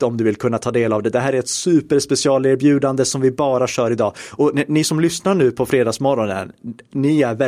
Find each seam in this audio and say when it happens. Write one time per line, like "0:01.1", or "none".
none